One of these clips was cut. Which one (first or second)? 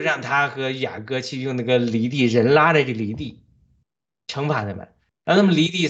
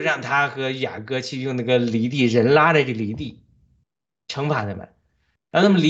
first